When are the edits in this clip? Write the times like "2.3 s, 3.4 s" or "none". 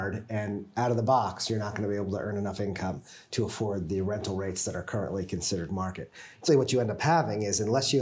6.5 s